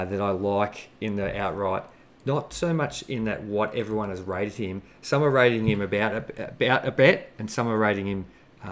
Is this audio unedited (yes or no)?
yes